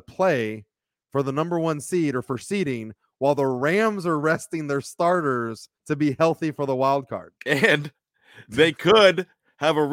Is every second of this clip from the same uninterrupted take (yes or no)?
no